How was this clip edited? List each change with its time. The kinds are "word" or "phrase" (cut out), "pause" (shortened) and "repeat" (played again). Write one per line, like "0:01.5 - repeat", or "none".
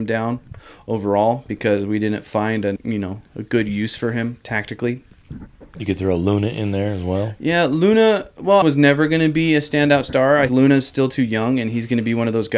0:02.8 - word
0:08.6 - phrase
0:10.5 - word